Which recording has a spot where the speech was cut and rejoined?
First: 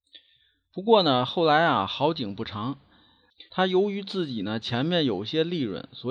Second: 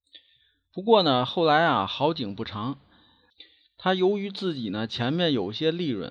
first; 1 cut; at 3.5 s

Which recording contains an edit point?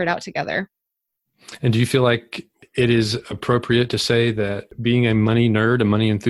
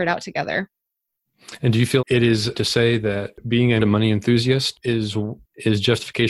second; 3 cuts; at 2.0 s, 2.5 s, 3.8 s

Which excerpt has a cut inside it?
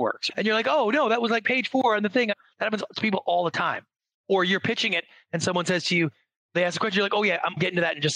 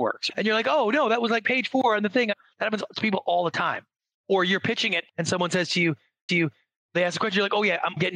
second; 2 cuts; at 5.1 s, 6.3 s

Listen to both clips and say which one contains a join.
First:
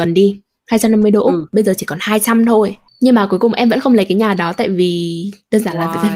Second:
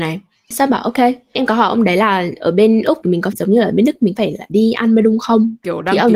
second; 4 cuts; at 3.0 s, 3.3 s, 4.2 s, 4.5 s

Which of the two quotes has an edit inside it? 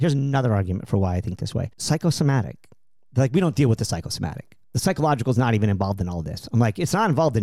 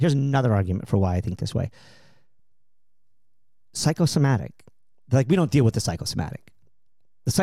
first; 2 cuts; at 1.7 s, 4.6 s

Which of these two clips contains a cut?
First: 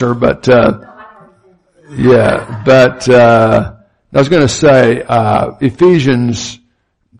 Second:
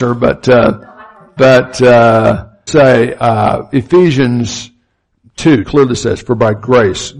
second; 3 cuts; at 1.4 s, 2.7 s, 5.6 s

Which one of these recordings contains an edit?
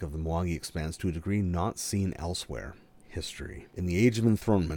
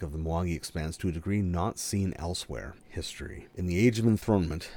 second; 1 cut; at 2.8 s

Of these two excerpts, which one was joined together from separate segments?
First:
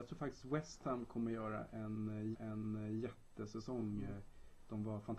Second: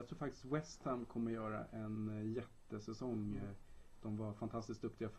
first; 1 cut; at 2.3 s

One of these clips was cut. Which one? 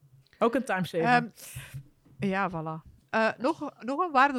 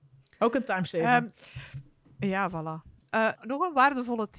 second; 1 cut; at 3.4 s

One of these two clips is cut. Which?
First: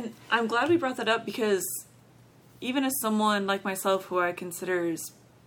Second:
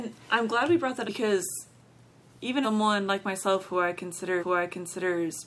second; 3 cuts; at 1.0 s, 2.6 s, 4.4 s

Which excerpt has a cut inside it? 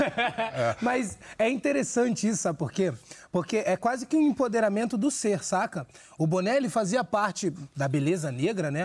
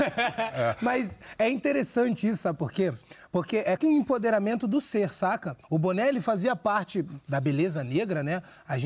second; 2 cuts; at 3.8 s, 5.6 s

